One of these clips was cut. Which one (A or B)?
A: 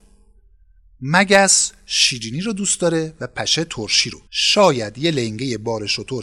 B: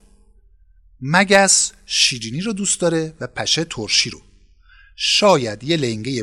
A